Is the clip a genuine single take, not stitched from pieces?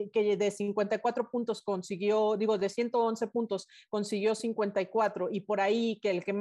yes; 0 cuts

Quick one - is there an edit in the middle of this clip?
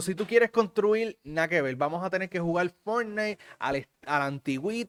no; 0 cuts

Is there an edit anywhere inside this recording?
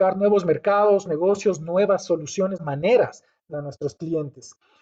yes; 3 cuts; at 1.1 s, 2.6 s, 3.5 s

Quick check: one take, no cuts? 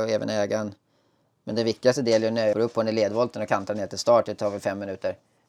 no; 1 cut; at 2.5 s

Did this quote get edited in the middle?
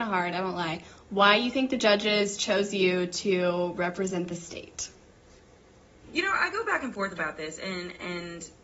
no; 0 cuts

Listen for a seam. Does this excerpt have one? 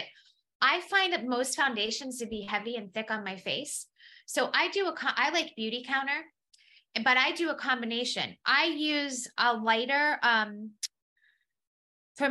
no; 0 cuts

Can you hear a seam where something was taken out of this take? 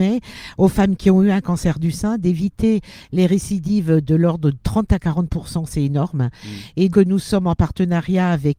yes; 1 cut; at 6.9 s

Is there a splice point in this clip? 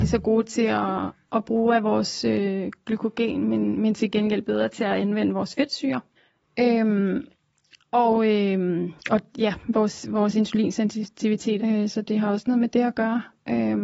yes; 3 cuts; at 6.2 s, 9.0 s, 11.6 s

